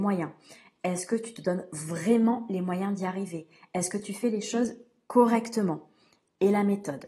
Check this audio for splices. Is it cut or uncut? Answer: uncut